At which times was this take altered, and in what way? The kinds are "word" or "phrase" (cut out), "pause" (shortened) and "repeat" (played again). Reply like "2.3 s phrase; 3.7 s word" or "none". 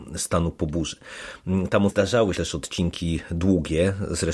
1.9 s word; 2.3 s word